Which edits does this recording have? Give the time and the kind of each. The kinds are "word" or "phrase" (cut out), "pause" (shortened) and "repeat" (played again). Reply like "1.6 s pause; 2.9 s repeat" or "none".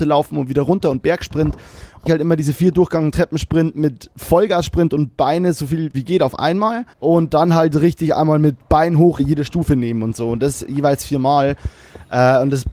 2.1 s phrase; 5.9 s word; 6.9 s pause; 9.2 s word